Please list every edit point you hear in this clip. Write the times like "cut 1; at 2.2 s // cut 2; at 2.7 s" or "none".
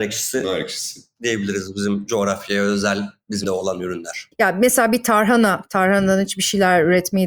cut 1; at 3.4 s